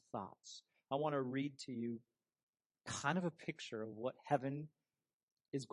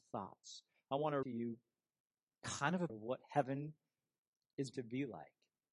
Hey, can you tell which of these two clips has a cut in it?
second; 3 cuts; at 1.2 s, 2.9 s, 4.7 s

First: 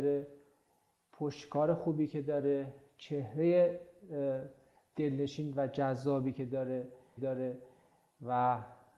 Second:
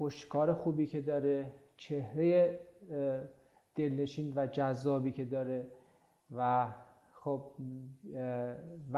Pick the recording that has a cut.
first; 1 cut; at 7.2 s

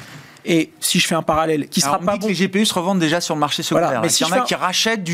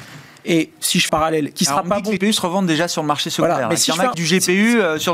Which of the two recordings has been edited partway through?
second; 3 cuts; at 1.1 s, 2.2 s, 4.1 s

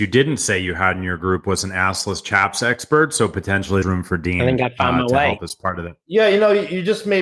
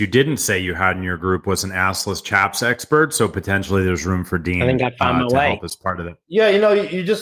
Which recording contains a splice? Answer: first; 1 cut; at 3.8 s

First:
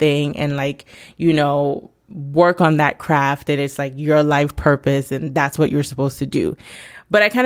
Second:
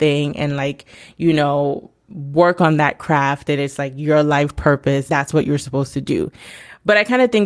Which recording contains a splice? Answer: second; 1 cut; at 5.1 s

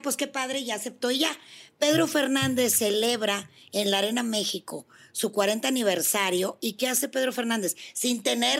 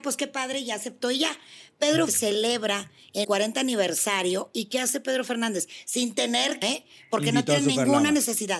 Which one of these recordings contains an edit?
second; 3 cuts; at 2.1 s, 3.2 s, 6.6 s

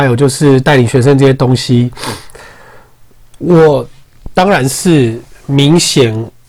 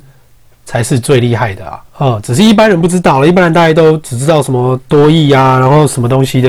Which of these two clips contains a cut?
second; 1 cut; at 1.9 s

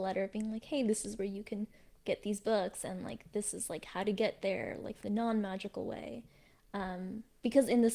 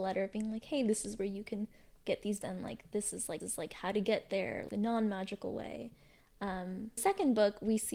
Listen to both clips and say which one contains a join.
second; 4 cuts; at 2.4 s, 3.4 s, 4.7 s, 7.0 s

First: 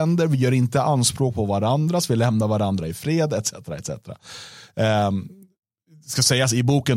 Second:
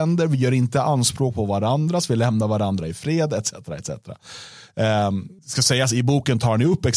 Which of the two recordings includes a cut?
second; 1 cut; at 5.4 s

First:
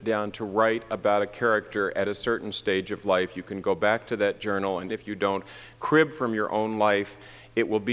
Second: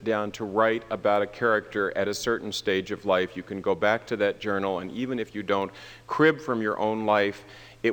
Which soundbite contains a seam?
first; 1 cut; at 4.9 s

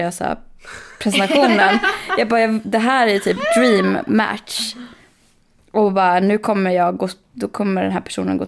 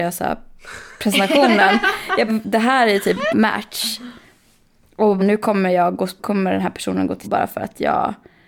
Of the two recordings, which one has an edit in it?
second; 5 cuts; at 2.3 s, 3.3 s, 5.2 s, 6.2 s, 7.2 s

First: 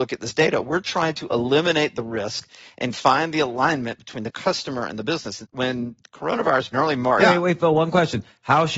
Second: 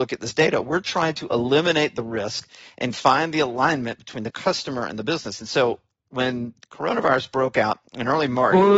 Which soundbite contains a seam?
first; 3 cuts; at 5.4 s, 6.7 s, 7.2 s

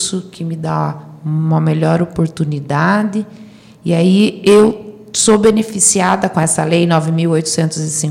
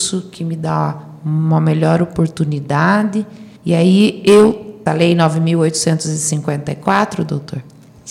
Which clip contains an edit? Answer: second; 2 cuts; at 3.6 s, 4.9 s

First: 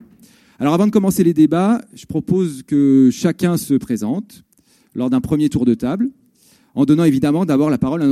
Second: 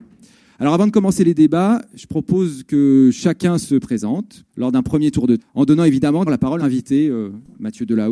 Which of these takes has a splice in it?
second; 4 cuts; at 4.5 s, 5.4 s, 6.3 s, 6.6 s

